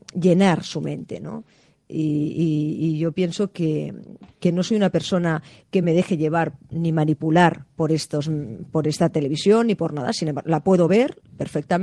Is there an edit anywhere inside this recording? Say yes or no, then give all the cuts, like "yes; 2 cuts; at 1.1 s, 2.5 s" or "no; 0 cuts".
no; 0 cuts